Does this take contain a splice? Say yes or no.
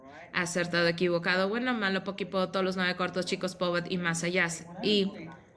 no